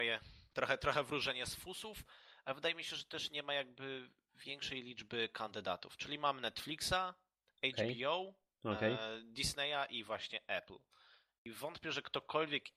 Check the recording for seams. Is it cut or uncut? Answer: uncut